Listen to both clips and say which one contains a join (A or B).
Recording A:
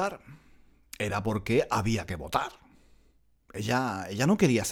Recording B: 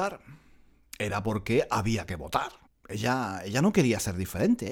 B